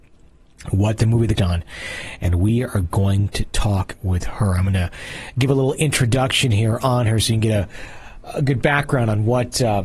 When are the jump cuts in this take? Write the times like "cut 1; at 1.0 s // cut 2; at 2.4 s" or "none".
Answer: cut 1; at 1.4 s